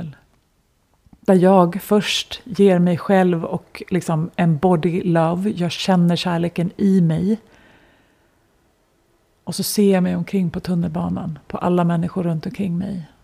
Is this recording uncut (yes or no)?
yes